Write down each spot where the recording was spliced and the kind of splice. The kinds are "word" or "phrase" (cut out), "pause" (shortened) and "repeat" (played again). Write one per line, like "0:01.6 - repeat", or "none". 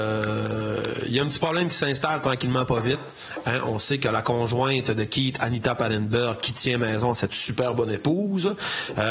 0:07.3 - phrase